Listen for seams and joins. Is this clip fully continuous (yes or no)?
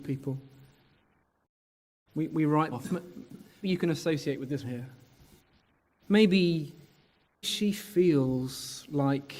no